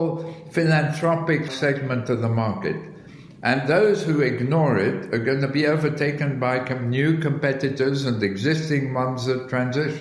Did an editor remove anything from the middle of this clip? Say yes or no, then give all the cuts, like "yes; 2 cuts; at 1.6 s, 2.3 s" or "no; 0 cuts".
yes; 1 cut; at 1.5 s